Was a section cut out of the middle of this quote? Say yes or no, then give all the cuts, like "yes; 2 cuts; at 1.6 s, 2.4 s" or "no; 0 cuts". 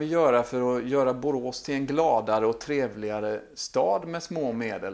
no; 0 cuts